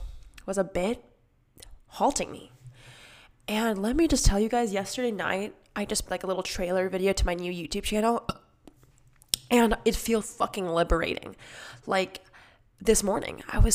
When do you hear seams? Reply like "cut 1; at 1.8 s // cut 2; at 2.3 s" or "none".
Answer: cut 1; at 6.1 s // cut 2; at 10.2 s